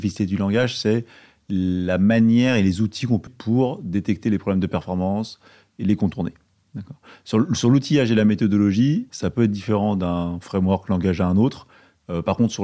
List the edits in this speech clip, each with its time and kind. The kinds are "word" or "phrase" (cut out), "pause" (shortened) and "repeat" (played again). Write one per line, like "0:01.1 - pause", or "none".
0:03.3 - word